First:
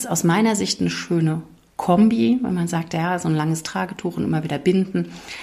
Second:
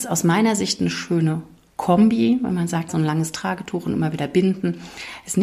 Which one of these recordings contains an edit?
second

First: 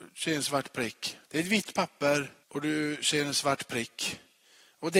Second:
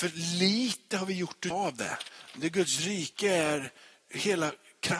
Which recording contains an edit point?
first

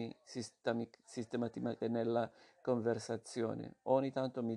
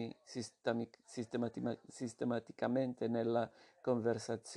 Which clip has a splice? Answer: first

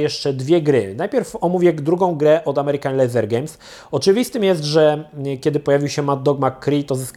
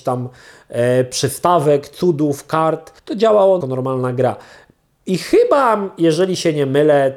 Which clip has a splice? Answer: second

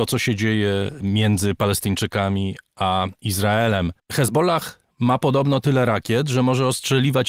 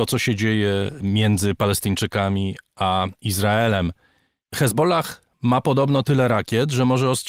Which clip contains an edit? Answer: first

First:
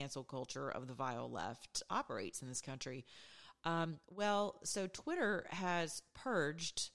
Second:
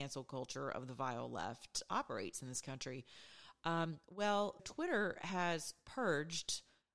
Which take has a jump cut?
second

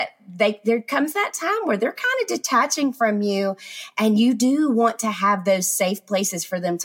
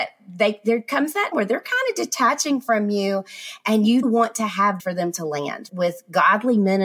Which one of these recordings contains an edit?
second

